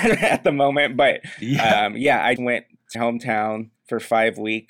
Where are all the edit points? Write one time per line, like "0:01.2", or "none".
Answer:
0:02.4
0:02.9